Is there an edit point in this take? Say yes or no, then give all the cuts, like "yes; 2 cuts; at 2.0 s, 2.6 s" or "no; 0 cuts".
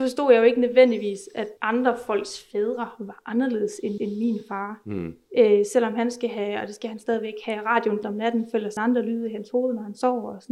yes; 4 cuts; at 1.6 s, 4.0 s, 8.0 s, 8.8 s